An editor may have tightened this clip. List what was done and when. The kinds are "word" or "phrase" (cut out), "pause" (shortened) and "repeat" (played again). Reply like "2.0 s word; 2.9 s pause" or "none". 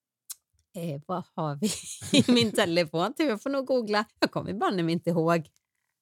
4.1 s pause